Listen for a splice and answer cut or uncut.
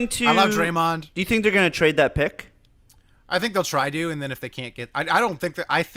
uncut